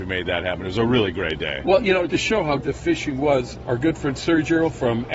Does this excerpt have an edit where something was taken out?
yes; 2 cuts; at 2.1 s, 2.6 s

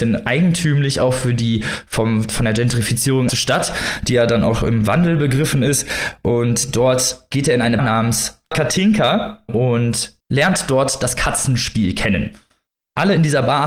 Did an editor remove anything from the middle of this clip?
yes; 3 cuts; at 3.3 s, 7.8 s, 9.5 s

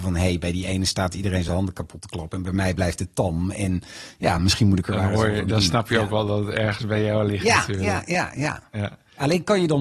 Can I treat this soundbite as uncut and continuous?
yes; 0 cuts

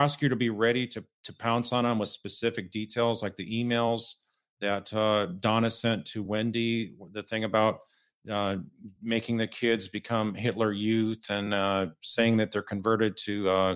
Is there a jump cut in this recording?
no; 0 cuts

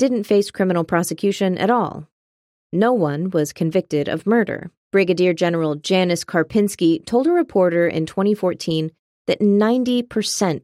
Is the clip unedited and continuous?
no; 1 cut; at 4.8 s

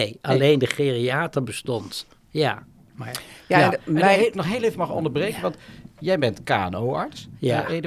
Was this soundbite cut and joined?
yes; 1 cut; at 4.3 s

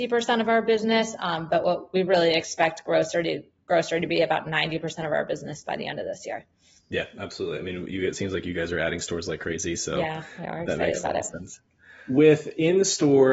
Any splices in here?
no; 0 cuts

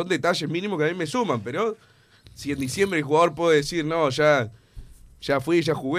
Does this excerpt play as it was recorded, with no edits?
yes; 0 cuts

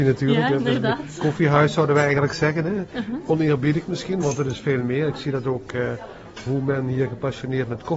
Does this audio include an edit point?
no; 0 cuts

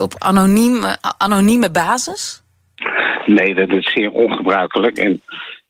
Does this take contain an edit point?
no; 0 cuts

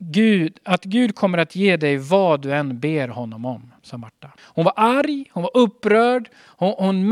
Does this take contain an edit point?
yes; 2 cuts; at 3.8 s, 4.4 s

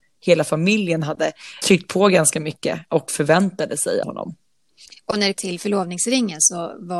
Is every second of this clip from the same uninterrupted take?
no; 3 cuts; at 1.6 s, 4.0 s, 5.3 s

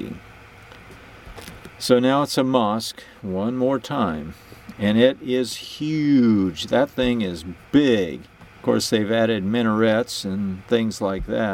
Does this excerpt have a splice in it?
yes; 1 cut; at 8.5 s

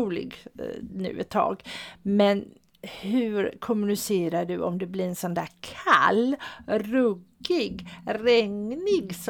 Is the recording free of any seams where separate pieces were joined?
yes; 0 cuts

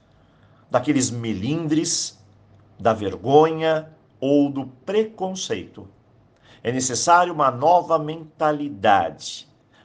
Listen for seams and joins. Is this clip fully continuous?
yes; 0 cuts

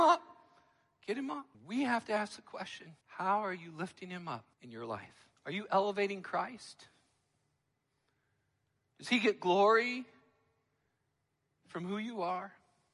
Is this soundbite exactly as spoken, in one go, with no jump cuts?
no; 4 cuts; at 1.5 s, 3.0 s, 4.5 s, 5.4 s

